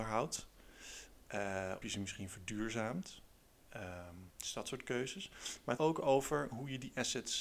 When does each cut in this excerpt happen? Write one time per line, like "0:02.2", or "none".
0:01.8
0:04.3
0:05.8